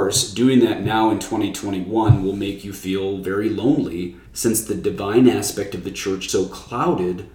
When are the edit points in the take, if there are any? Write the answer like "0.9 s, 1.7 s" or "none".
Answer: 4.3 s, 6.3 s